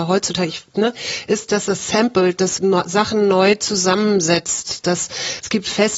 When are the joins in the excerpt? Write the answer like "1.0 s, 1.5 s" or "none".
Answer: 2.6 s

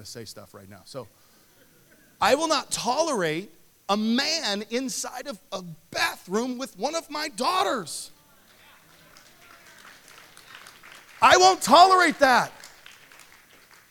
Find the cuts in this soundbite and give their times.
none

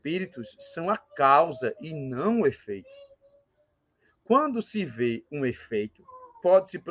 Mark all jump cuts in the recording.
none

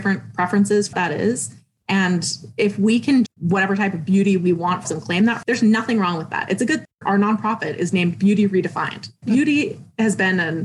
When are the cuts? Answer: 0.9 s, 3.3 s, 4.8 s, 5.4 s, 6.8 s

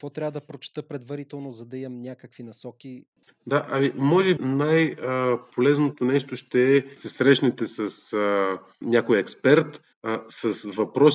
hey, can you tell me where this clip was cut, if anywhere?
4.4 s, 7.0 s, 9.9 s

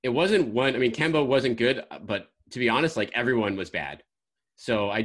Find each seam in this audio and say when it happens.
none

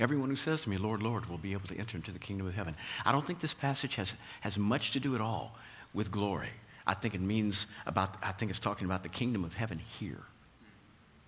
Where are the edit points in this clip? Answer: none

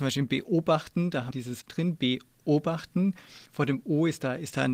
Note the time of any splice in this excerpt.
1.3 s, 1.6 s, 3.5 s

